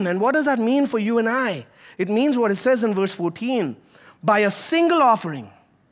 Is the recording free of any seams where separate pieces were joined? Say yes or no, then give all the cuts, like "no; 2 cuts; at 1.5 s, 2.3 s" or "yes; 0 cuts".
yes; 0 cuts